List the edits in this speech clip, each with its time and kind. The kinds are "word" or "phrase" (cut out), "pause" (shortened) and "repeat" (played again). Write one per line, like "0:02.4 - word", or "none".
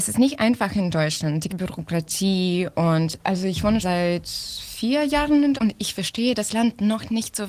0:01.5 - word
0:03.8 - word
0:05.6 - word